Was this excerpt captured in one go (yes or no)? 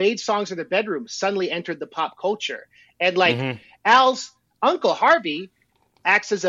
yes